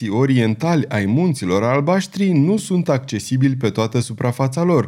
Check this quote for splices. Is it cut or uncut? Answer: uncut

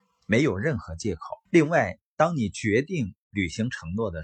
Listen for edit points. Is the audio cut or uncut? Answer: cut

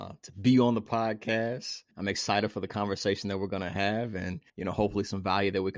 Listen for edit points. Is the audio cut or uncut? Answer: cut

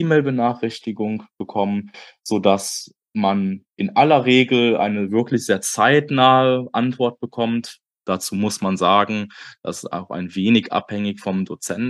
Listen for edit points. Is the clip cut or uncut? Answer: uncut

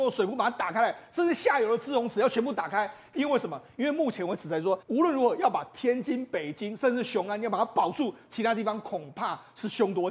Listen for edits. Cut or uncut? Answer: cut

